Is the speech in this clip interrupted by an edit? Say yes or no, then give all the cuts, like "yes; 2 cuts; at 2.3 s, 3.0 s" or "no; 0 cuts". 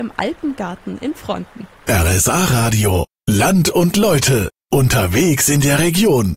no; 0 cuts